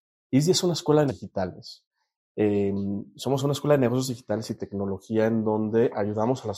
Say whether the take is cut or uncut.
cut